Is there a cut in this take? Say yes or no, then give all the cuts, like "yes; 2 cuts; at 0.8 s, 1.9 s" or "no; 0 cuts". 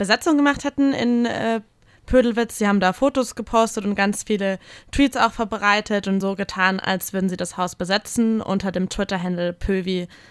no; 0 cuts